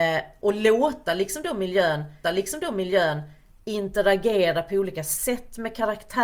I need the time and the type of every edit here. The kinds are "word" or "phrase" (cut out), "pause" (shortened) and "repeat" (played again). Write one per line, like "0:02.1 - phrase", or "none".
0:02.2 - repeat